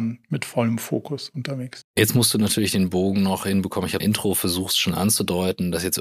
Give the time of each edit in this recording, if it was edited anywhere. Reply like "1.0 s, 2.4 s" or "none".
4.0 s